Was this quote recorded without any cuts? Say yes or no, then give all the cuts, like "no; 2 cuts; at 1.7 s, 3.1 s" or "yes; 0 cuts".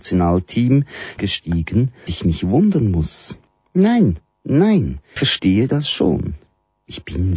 no; 3 cuts; at 1.2 s, 2.1 s, 5.2 s